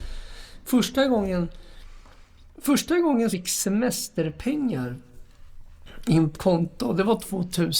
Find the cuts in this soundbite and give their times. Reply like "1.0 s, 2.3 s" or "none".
2.5 s, 3.3 s, 6.3 s